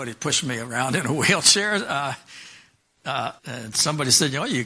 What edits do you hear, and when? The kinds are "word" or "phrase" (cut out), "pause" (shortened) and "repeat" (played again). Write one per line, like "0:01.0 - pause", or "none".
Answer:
0:03.4 - pause